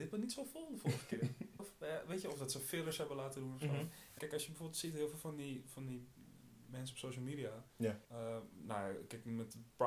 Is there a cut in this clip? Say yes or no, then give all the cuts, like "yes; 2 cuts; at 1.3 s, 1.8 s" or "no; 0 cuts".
yes; 3 cuts; at 1.6 s, 4.2 s, 8.0 s